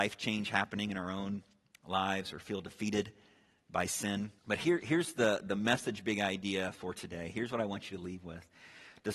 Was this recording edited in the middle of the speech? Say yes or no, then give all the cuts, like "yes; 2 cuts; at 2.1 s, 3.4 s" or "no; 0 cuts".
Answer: yes; 1 cut; at 4.4 s